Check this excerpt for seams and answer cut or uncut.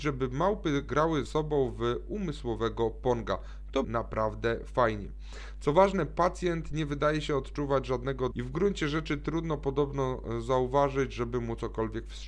cut